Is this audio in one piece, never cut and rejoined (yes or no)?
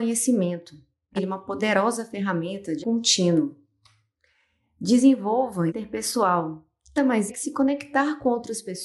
no